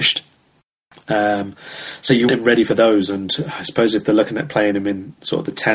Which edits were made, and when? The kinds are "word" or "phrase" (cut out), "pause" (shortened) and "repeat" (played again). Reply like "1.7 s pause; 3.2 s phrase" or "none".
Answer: 2.3 s word